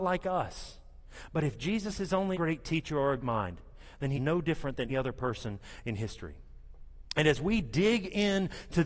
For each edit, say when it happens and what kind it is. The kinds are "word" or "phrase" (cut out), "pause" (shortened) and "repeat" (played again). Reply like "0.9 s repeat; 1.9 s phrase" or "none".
2.3 s word; 3.2 s word; 4.1 s word; 4.9 s word